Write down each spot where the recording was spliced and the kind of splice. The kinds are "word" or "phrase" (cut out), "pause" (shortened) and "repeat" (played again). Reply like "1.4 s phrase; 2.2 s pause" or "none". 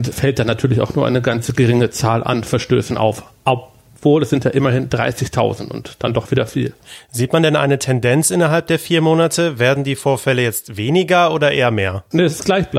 none